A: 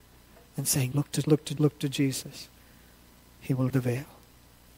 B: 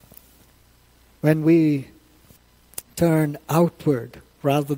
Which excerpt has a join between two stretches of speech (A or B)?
A